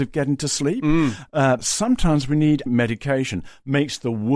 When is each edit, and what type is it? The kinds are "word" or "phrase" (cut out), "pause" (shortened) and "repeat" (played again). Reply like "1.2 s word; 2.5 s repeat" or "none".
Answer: 1.6 s word; 2.7 s word